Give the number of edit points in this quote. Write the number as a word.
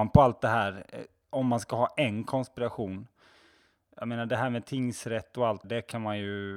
one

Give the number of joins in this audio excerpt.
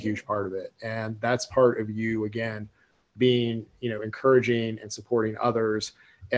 zero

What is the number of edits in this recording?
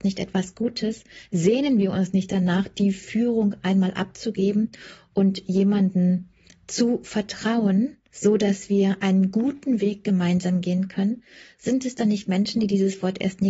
one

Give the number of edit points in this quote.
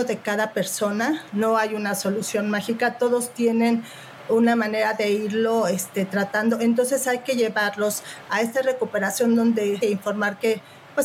one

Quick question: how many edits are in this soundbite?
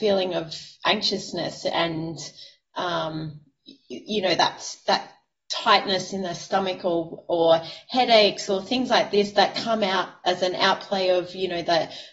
zero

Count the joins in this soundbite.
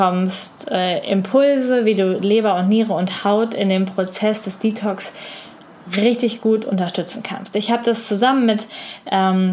zero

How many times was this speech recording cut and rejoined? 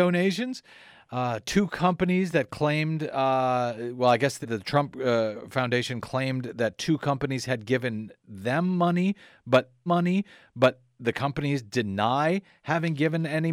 two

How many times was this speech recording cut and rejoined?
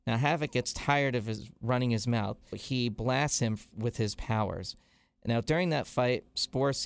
one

